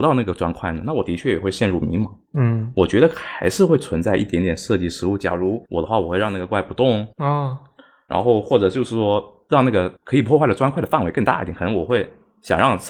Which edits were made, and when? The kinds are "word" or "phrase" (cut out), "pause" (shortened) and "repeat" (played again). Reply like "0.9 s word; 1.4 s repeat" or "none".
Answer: 5.7 s pause; 7.1 s pause; 10.0 s pause